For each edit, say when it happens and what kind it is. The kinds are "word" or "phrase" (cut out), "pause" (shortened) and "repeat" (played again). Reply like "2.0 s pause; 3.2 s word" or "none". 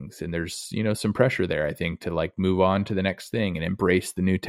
none